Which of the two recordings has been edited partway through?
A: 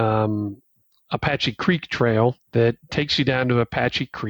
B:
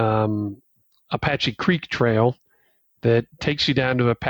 A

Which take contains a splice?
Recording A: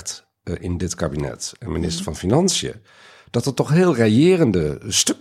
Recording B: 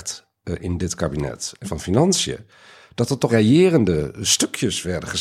B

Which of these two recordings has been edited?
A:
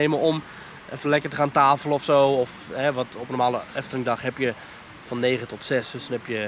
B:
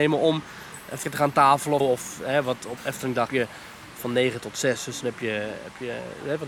B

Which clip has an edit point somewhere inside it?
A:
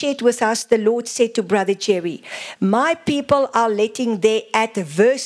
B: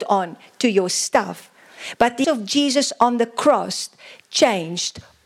B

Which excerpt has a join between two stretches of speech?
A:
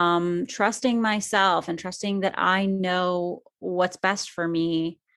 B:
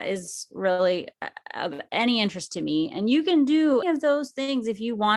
B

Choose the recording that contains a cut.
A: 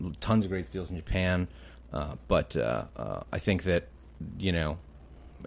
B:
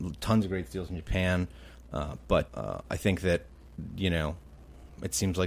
B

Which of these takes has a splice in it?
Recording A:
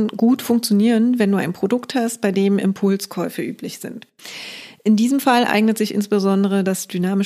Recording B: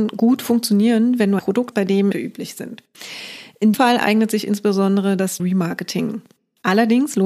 B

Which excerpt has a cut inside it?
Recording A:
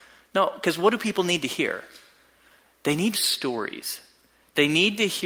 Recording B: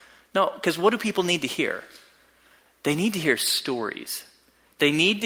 A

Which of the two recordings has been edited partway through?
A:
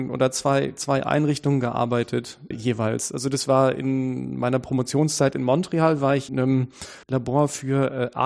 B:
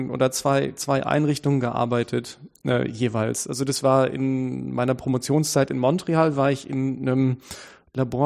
A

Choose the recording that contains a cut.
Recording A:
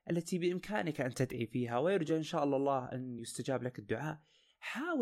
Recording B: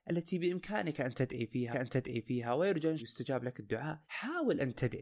B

